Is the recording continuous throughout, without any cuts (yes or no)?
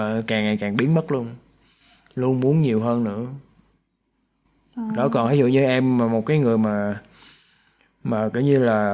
yes